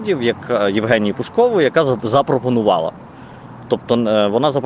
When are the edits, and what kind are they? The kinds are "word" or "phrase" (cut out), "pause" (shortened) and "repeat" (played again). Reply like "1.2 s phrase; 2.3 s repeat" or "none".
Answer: none